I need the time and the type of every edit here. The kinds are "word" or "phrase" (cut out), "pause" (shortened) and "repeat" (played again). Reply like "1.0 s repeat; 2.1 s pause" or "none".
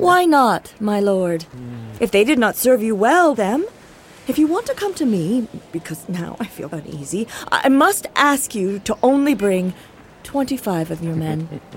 3.3 s phrase; 6.7 s word

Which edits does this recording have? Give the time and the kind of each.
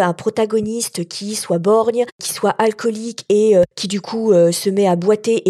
none

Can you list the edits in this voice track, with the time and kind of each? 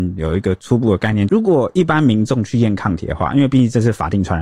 1.3 s phrase

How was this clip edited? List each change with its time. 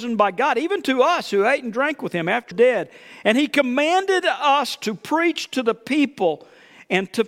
2.5 s phrase

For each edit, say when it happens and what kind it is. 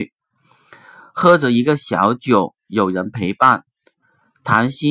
none

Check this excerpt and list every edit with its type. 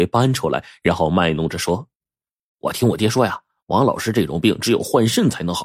none

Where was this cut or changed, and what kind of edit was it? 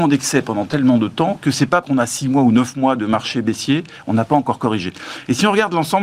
1.8 s word

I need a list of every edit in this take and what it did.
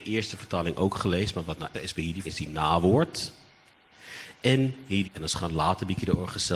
1.7 s word; 2.2 s word; 5.0 s word

